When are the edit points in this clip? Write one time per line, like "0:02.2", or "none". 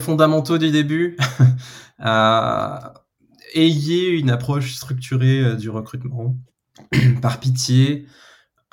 0:06.5